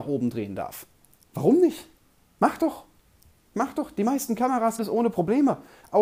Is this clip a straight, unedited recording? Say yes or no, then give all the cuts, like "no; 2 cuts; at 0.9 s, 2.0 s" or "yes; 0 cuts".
no; 1 cut; at 4.8 s